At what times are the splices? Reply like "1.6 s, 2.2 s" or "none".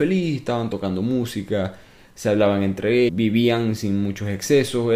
3.1 s